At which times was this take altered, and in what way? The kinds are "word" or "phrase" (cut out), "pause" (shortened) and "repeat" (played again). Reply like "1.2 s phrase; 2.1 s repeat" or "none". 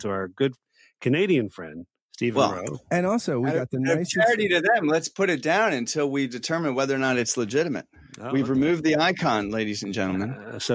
none